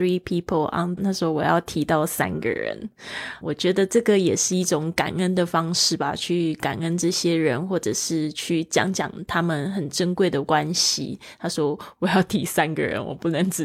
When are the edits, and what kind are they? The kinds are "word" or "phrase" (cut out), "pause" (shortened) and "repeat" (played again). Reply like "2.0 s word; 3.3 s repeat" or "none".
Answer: 1.0 s phrase; 3.4 s word